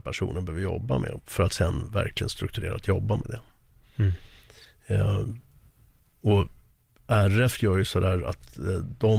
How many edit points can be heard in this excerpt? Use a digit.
0